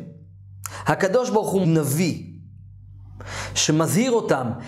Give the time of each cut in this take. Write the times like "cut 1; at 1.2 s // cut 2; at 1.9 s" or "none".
cut 1; at 1.6 s